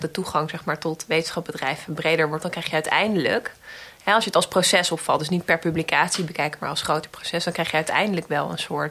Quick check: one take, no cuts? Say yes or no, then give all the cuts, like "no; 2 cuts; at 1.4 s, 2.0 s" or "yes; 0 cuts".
no; 1 cut; at 2.4 s